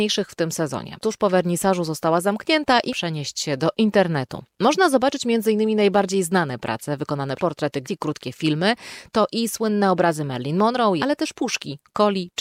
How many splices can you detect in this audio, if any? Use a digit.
5